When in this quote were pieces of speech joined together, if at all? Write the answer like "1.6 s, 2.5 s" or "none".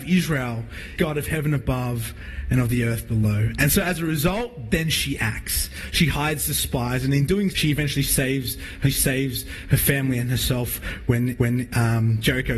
1.0 s, 7.5 s, 8.8 s, 11.4 s